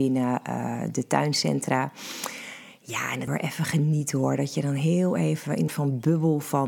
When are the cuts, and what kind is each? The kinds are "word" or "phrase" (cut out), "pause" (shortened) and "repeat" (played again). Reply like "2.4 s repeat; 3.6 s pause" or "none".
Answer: 3.3 s phrase; 5.7 s phrase